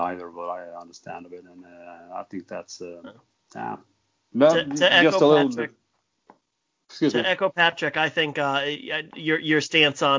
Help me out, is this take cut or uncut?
uncut